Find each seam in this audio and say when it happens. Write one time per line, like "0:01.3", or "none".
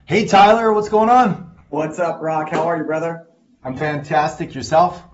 0:03.8